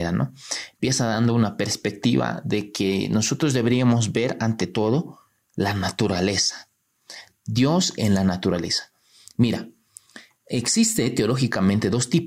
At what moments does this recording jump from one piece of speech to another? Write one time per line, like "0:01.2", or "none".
none